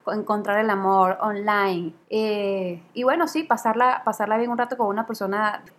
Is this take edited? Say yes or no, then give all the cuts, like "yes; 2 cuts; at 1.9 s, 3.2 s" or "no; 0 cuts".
yes; 1 cut; at 2.0 s